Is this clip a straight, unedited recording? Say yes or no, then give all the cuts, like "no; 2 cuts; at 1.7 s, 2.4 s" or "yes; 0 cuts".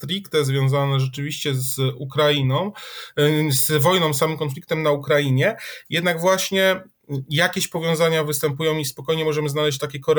yes; 0 cuts